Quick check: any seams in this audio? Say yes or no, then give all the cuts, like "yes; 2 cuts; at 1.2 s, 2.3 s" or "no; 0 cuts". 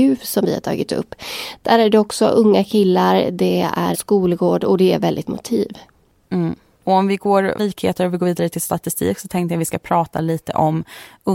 yes; 3 cuts; at 3.9 s, 5.3 s, 7.6 s